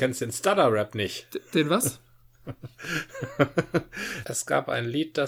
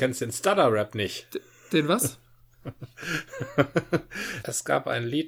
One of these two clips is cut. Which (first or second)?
first